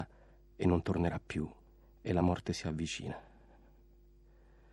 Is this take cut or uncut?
uncut